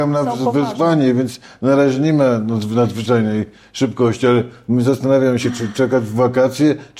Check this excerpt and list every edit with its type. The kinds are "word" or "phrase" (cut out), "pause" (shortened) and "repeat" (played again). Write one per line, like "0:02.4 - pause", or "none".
none